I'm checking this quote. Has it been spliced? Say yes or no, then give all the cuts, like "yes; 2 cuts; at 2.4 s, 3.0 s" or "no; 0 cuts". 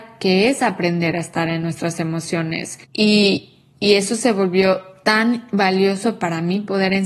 yes; 1 cut; at 2.8 s